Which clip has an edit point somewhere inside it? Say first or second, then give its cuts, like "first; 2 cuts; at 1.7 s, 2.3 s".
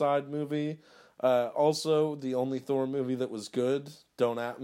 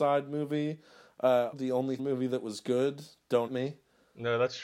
second; 3 cuts; at 1.5 s, 2.0 s, 3.5 s